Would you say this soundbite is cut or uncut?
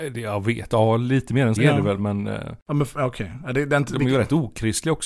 cut